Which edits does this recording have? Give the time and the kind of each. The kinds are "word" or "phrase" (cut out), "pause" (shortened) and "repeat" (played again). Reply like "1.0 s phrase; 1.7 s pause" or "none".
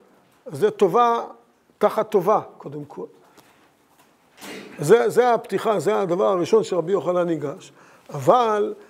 none

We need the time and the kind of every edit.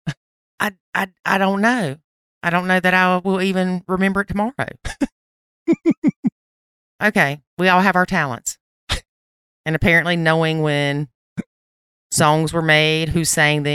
none

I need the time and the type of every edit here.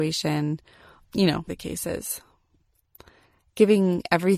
1.1 s word; 1.5 s word

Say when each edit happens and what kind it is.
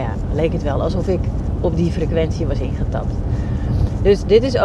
none

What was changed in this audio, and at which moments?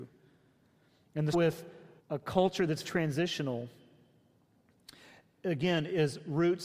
1.3 s word; 2.0 s pause; 2.8 s word

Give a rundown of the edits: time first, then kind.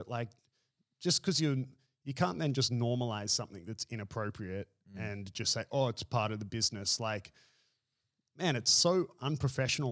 none

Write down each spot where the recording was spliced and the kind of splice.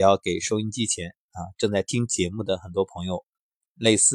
none

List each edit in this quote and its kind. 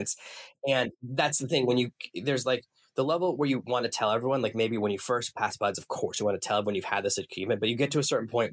none

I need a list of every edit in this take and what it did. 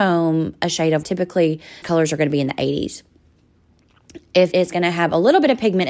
1.0 s word; 1.8 s word; 4.5 s word

